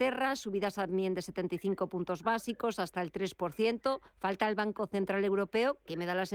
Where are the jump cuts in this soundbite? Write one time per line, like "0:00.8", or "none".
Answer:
0:04.1